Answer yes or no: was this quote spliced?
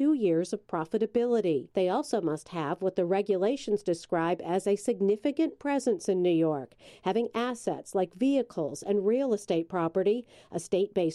yes